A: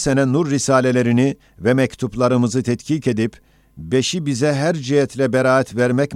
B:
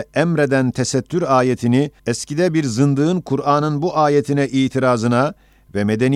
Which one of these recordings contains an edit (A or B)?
B